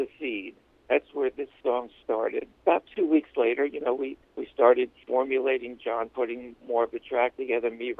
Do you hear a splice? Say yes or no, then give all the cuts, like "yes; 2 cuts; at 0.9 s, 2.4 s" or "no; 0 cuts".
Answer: yes; 1 cut; at 2.5 s